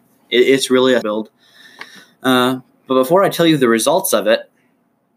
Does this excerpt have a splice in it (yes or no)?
yes